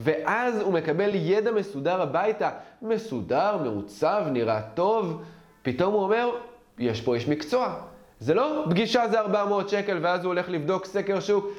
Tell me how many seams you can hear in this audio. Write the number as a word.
zero